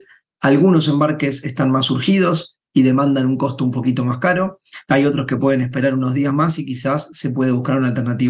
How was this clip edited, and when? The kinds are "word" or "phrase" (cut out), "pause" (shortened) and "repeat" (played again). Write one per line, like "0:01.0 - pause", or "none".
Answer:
none